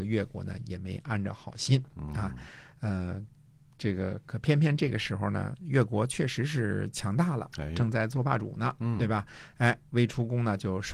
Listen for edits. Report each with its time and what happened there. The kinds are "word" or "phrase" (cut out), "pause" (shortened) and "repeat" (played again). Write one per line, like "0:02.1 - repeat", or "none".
none